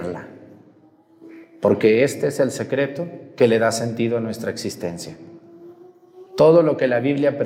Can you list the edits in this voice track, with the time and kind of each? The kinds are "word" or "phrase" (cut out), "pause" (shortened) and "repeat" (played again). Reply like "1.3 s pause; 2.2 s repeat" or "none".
6.3 s pause